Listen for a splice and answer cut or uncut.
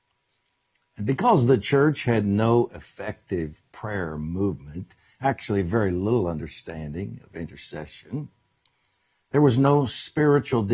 uncut